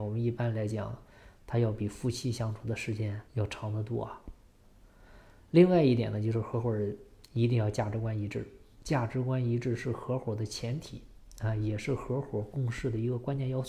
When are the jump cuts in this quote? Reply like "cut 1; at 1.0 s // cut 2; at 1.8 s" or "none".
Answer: cut 1; at 3.3 s